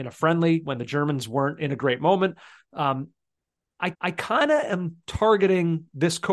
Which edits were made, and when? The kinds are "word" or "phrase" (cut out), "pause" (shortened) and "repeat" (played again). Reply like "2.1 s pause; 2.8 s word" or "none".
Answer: 3.9 s repeat